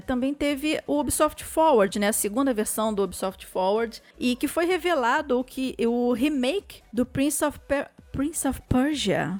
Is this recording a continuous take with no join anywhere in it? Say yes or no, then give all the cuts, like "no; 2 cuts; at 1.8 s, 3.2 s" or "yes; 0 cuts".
yes; 0 cuts